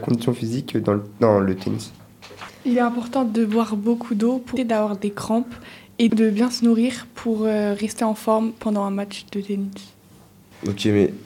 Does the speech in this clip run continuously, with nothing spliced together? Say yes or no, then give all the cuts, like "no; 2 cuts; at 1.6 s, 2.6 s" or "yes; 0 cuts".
no; 2 cuts; at 4.6 s, 6.1 s